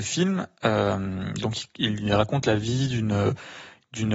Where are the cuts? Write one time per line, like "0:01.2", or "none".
none

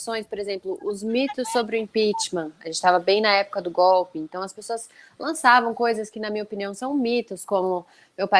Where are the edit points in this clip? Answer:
none

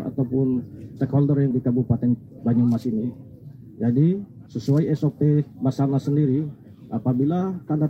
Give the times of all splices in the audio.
0:01.5

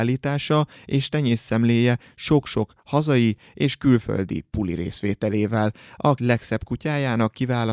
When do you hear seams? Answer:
0:06.2

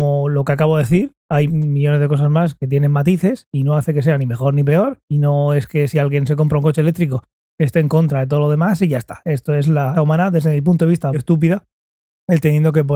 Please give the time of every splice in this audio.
0:01.5
0:05.0
0:09.9
0:11.1

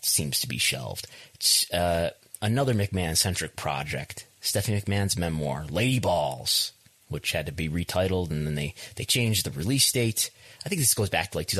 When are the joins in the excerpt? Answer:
none

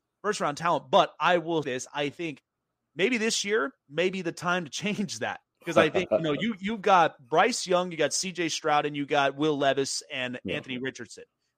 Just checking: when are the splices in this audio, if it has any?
0:01.6
0:03.8

